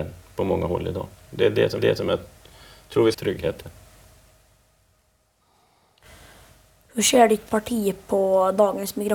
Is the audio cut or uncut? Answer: cut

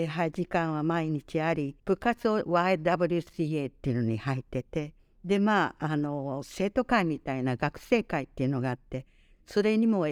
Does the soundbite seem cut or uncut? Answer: cut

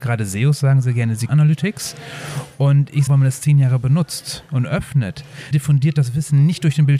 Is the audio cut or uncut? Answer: cut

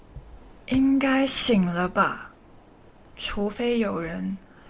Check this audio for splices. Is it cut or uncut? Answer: uncut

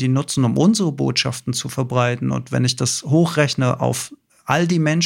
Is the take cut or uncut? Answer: uncut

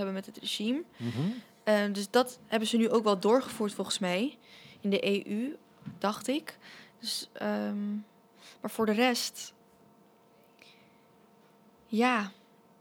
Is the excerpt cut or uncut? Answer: uncut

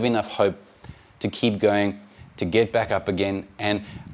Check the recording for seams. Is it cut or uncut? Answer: uncut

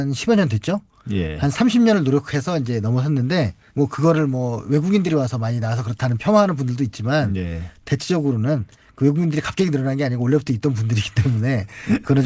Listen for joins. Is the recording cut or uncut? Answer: cut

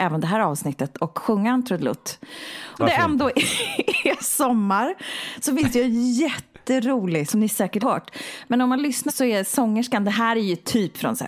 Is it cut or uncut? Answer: cut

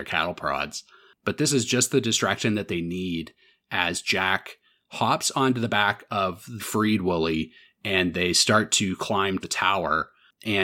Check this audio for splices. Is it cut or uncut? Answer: cut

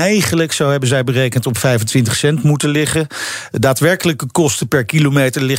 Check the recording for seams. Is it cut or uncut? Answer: uncut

